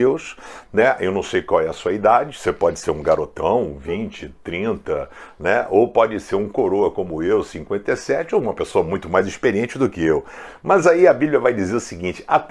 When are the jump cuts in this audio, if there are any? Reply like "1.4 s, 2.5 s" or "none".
none